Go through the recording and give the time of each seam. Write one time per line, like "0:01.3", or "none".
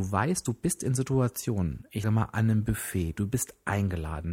0:02.0